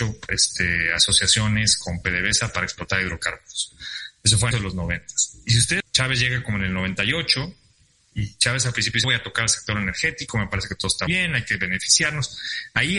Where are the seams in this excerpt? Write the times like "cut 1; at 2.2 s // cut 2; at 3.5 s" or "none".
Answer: cut 1; at 4.5 s // cut 2; at 5.8 s // cut 3; at 9.0 s // cut 4; at 11.1 s